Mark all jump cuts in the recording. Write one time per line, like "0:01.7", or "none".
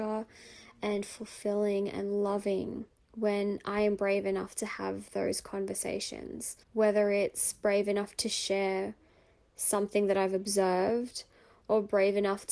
0:02.9
0:06.6